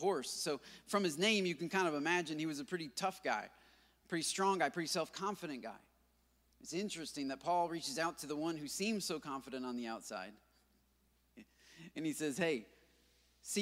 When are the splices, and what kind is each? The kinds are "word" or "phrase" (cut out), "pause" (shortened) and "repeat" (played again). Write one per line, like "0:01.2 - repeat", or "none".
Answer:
none